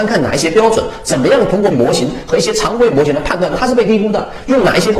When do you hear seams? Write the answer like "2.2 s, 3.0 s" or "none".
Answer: 1.7 s